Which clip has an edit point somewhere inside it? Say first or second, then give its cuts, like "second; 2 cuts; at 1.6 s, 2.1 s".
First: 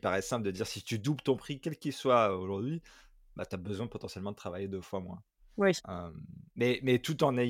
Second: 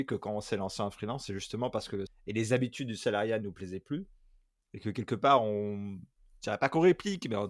second; 1 cut; at 2.1 s